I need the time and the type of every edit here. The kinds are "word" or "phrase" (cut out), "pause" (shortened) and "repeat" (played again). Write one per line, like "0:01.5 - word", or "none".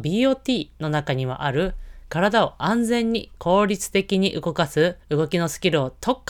0:05.0 - pause